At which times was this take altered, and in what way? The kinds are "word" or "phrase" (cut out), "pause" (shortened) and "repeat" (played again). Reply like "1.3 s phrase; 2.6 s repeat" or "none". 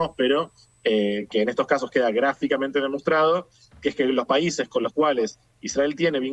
none